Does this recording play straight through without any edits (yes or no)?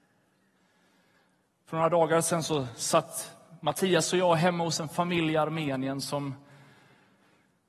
yes